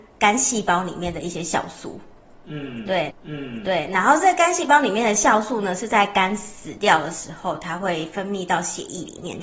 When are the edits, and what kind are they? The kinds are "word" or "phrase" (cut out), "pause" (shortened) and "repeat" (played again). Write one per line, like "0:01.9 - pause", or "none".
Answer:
0:03.1 - repeat